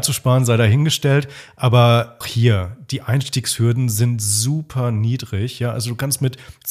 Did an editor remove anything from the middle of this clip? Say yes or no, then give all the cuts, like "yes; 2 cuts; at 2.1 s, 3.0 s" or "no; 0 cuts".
yes; 1 cut; at 2.2 s